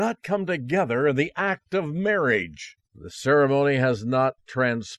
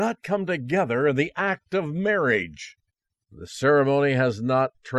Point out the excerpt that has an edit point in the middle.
first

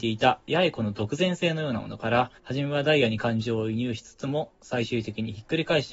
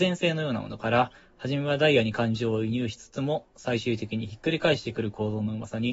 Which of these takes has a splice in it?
first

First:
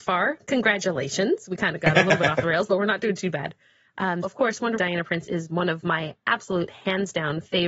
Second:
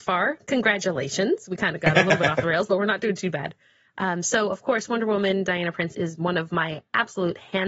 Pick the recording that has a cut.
first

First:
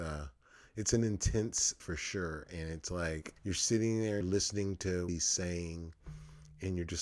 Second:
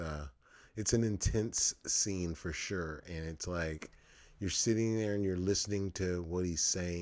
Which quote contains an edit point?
first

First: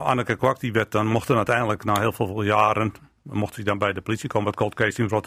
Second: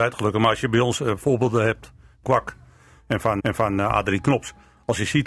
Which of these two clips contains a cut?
second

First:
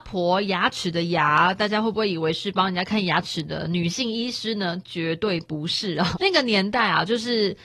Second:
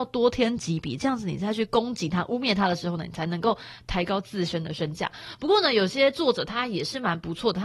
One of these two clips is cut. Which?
first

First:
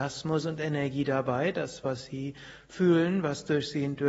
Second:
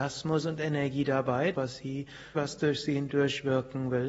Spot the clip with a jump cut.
second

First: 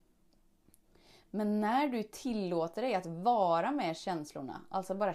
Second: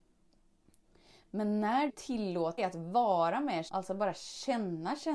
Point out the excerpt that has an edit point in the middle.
second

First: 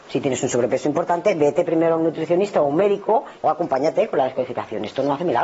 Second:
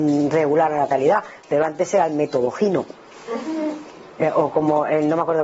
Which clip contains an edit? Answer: first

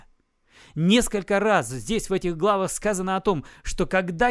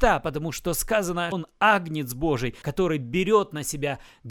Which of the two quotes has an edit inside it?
second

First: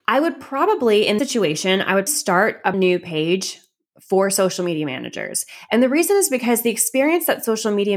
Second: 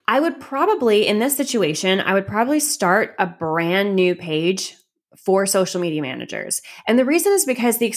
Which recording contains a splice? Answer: first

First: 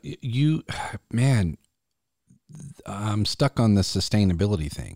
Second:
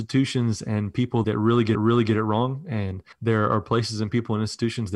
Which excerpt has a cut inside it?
second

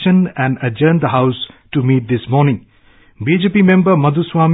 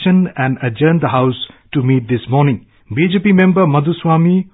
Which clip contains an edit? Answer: second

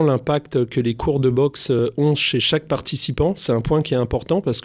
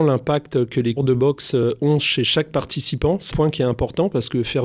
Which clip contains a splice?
second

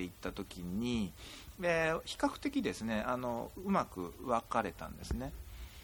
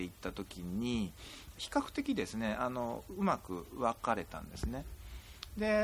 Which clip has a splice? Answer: second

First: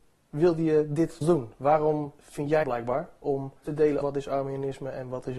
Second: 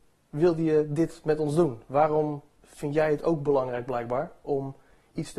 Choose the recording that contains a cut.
first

